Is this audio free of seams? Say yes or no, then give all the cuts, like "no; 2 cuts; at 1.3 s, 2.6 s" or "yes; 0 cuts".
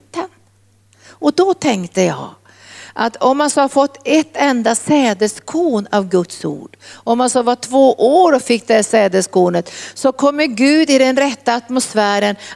yes; 0 cuts